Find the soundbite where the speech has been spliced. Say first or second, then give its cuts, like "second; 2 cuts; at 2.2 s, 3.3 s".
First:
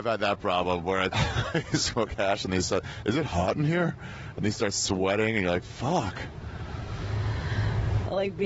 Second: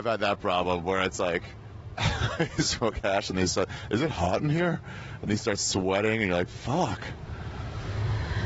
first; 1 cut; at 1.1 s